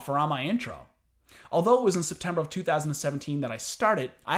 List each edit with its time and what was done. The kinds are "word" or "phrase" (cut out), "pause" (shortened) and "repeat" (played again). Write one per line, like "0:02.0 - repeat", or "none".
none